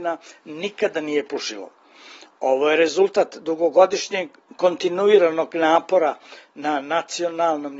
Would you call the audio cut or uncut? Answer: uncut